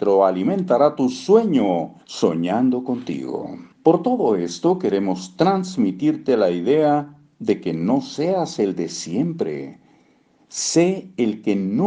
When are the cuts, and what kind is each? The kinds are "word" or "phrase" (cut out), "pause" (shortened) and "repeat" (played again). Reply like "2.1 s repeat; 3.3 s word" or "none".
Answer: 2.0 s pause; 3.7 s pause